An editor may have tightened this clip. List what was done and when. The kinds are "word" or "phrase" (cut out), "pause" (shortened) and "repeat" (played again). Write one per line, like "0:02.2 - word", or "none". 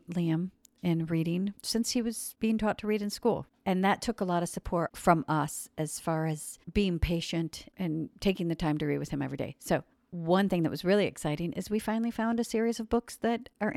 0:01.6 - pause
0:06.6 - pause
0:09.9 - pause